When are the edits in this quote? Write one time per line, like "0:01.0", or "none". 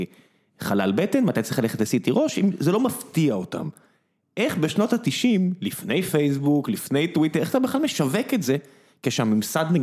none